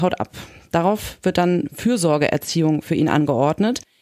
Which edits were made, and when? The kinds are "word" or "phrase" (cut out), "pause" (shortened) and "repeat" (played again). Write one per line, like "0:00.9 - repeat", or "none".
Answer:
none